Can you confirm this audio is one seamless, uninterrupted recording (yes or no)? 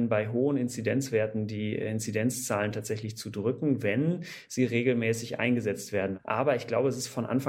yes